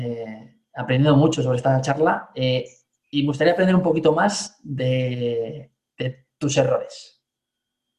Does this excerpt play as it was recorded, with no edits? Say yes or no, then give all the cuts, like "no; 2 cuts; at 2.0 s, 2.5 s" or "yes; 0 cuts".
yes; 0 cuts